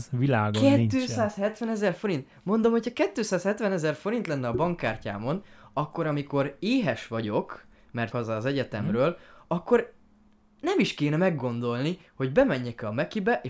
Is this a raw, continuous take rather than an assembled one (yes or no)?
no